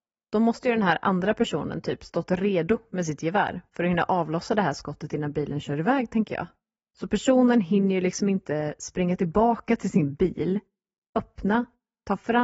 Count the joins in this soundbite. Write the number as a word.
zero